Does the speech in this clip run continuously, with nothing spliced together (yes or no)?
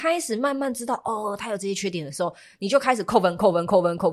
yes